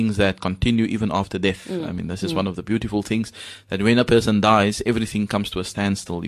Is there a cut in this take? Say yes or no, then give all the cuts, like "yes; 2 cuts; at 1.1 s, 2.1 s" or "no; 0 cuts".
no; 0 cuts